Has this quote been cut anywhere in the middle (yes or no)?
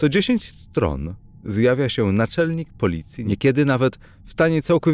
no